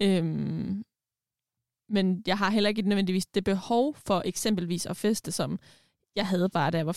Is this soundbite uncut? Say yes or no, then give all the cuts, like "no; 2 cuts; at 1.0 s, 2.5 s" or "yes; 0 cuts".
yes; 0 cuts